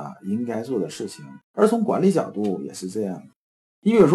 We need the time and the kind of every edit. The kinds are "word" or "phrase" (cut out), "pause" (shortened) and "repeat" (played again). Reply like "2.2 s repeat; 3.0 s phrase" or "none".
1.4 s pause

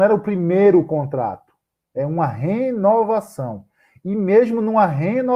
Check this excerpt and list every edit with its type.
none

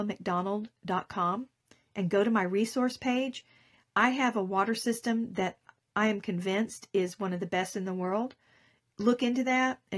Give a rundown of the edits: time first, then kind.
none

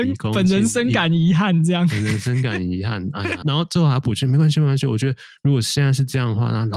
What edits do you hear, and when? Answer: 3.4 s phrase

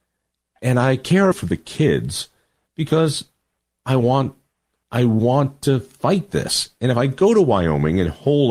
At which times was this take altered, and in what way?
1.3 s phrase

